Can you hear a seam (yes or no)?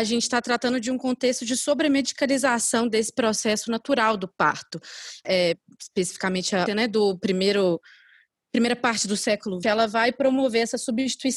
yes